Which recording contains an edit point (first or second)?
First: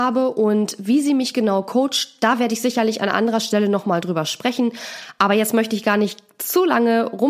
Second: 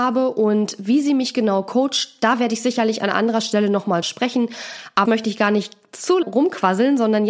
second